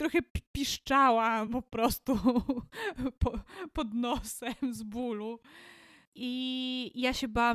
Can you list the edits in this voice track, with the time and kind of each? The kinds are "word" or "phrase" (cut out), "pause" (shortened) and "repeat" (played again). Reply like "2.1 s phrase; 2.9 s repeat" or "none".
none